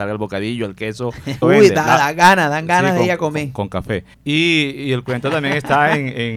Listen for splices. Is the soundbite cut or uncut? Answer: cut